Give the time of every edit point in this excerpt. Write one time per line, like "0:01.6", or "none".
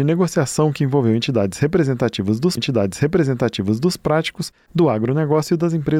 0:02.6